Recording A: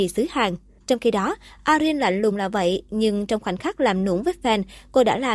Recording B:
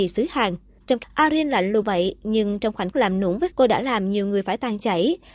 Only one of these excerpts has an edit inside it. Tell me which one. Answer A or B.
B